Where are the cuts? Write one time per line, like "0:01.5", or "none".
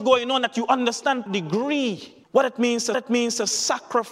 0:01.3
0:02.2
0:02.9